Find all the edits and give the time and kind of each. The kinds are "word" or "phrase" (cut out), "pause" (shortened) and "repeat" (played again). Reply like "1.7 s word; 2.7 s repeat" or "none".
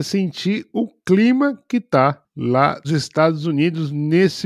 2.8 s word

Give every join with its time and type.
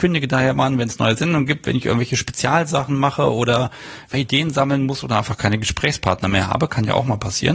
4.1 s phrase

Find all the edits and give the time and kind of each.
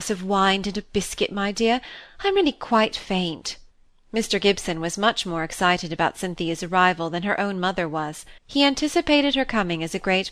3.7 s pause; 8.4 s pause

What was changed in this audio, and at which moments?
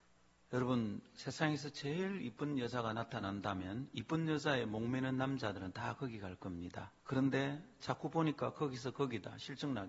7.0 s pause

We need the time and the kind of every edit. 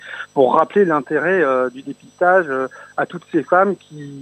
none

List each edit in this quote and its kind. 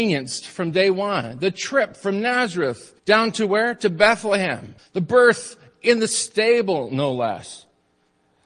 3.0 s pause; 4.8 s pause

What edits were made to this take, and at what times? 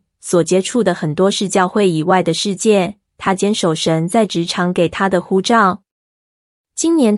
none

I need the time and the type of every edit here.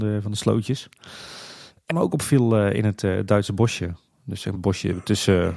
1.9 s word; 4.5 s word

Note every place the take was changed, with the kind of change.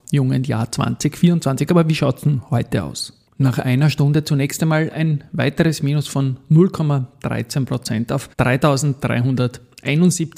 8.3 s pause

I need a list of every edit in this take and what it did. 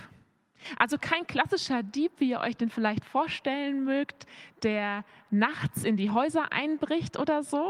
none

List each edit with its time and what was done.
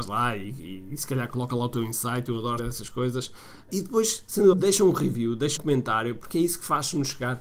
2.6 s word; 3.7 s word; 4.5 s word; 5.6 s word

